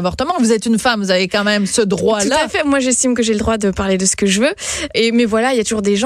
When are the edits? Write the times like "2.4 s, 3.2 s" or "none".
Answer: 4.9 s